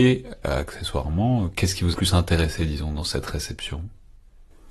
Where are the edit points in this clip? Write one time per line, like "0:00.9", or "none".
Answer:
0:01.9